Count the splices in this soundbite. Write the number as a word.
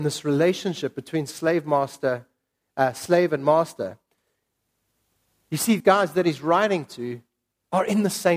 one